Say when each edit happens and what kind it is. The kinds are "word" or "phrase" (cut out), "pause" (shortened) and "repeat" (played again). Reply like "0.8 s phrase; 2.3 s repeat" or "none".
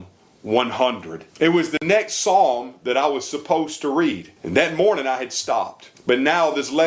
1.3 s pause; 4.4 s pause; 5.9 s pause